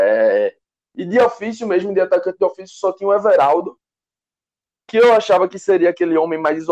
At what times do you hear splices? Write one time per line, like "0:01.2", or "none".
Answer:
none